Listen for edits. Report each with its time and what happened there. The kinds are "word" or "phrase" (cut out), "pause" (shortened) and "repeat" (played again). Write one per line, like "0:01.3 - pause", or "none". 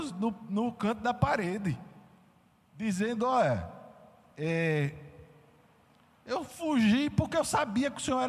none